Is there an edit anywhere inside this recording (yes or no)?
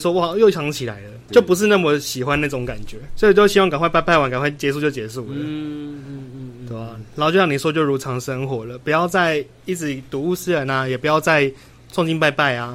yes